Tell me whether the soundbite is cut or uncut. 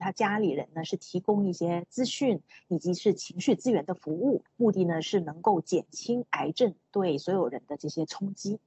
cut